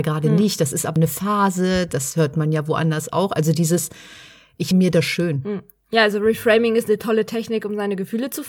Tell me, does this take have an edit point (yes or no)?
yes